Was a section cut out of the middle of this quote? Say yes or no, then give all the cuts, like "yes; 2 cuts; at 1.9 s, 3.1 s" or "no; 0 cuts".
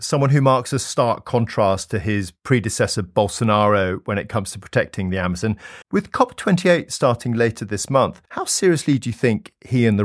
yes; 2 cuts; at 5.8 s, 8.3 s